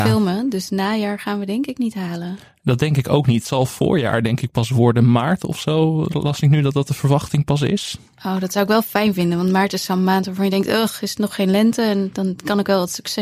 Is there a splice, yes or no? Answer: no